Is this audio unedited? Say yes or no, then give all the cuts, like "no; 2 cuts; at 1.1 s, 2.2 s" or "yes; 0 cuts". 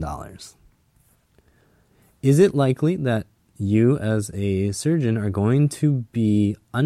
yes; 0 cuts